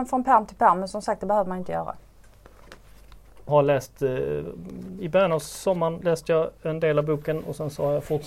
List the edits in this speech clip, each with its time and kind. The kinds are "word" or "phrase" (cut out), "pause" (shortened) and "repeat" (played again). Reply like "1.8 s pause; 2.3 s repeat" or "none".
3.5 s word